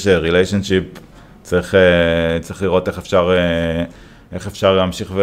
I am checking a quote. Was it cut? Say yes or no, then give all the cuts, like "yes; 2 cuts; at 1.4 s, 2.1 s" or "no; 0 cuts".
no; 0 cuts